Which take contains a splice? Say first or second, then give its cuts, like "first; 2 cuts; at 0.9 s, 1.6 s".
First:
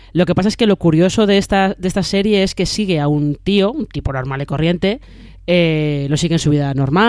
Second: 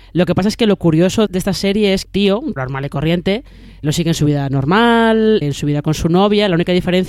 second; 5 cuts; at 1.3 s, 2.0 s, 2.6 s, 3.8 s, 5.4 s